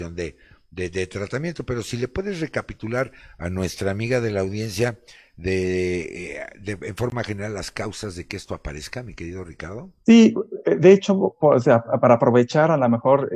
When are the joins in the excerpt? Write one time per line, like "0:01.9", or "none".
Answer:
none